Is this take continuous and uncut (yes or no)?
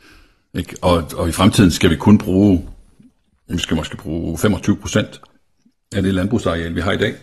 yes